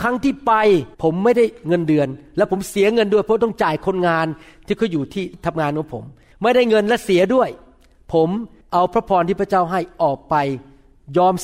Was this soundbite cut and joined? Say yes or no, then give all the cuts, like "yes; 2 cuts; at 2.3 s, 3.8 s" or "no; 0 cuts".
yes; 1 cut; at 0.9 s